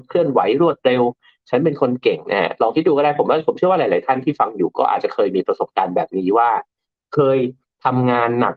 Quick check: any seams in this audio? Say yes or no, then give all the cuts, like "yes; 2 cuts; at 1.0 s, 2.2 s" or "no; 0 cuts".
no; 0 cuts